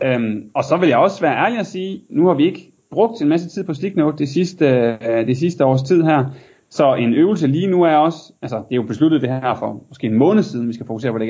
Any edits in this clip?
no; 0 cuts

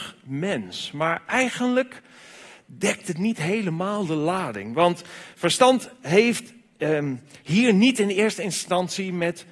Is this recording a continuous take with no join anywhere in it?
yes; 0 cuts

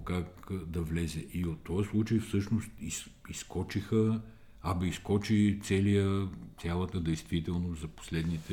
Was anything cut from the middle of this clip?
yes; 1 cut; at 6.9 s

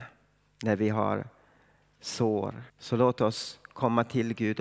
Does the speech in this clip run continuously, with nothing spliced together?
no; 1 cut; at 2.7 s

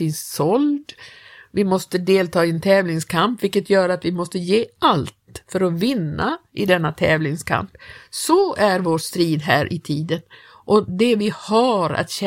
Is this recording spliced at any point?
no; 0 cuts

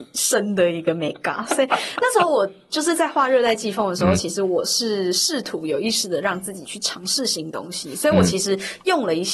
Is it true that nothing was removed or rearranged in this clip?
yes; 0 cuts

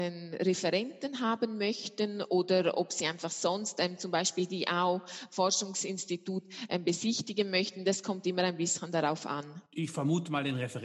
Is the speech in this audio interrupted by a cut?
yes; 1 cut; at 9.7 s

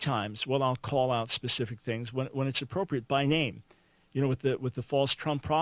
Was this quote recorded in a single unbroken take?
yes; 0 cuts

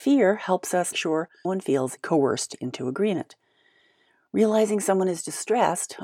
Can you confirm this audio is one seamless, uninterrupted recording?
no; 3 cuts; at 0.9 s, 1.4 s, 2.0 s

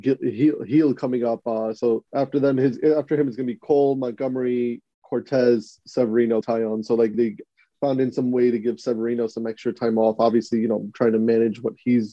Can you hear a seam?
yes; 3 cuts; at 2.1 s, 6.4 s, 7.1 s

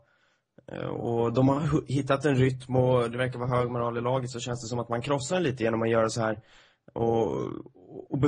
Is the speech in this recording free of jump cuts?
yes; 0 cuts

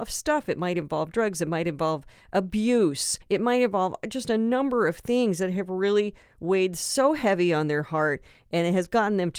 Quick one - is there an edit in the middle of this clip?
yes; 1 cut; at 3.2 s

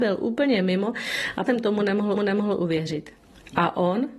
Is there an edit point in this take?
yes; 2 cuts; at 1.5 s, 2.1 s

